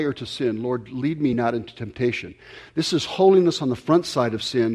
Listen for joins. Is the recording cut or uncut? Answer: uncut